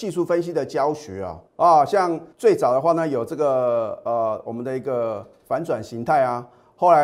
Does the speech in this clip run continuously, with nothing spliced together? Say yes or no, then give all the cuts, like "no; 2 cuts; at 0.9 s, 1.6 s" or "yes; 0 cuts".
no; 2 cuts; at 1.5 s, 2.3 s